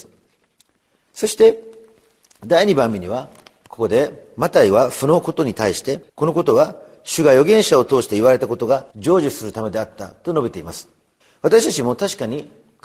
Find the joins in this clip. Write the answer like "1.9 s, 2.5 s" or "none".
6.1 s, 8.9 s, 11.2 s

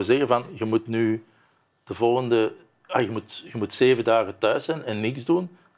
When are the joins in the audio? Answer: none

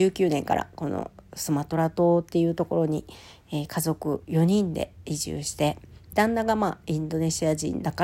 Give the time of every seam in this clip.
6.1 s

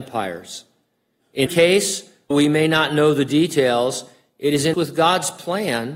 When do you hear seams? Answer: 1.5 s, 2.3 s, 4.7 s

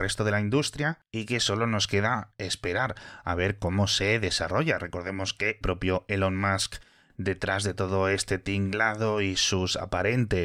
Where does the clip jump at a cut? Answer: 5.6 s

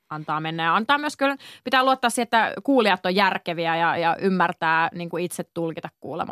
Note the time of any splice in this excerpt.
none

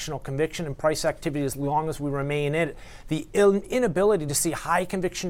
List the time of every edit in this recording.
none

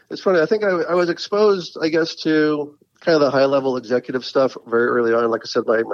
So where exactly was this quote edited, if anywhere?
none

